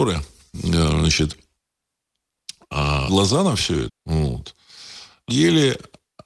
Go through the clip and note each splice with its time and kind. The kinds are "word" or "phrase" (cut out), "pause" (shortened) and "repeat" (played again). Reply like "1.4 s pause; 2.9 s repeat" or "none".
3.1 s word; 3.9 s word; 5.3 s word